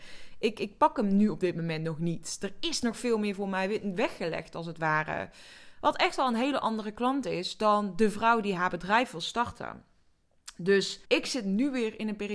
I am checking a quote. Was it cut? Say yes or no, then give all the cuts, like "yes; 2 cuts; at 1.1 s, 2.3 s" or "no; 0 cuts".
yes; 1 cut; at 11.0 s